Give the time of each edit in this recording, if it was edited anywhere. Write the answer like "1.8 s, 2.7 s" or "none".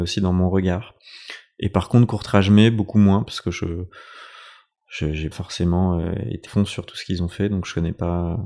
5.3 s, 6.5 s